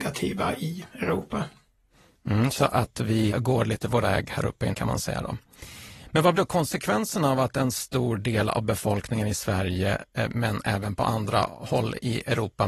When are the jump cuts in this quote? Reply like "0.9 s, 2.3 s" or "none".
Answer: 3.3 s, 4.0 s, 4.7 s, 6.3 s